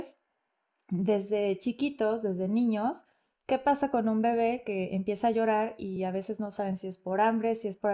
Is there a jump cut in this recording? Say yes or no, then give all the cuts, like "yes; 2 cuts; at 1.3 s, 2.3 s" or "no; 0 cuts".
no; 0 cuts